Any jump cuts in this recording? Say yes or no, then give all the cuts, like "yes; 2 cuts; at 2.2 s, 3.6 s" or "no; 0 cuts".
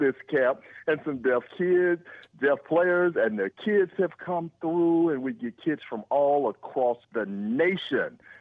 yes; 1 cut; at 7.0 s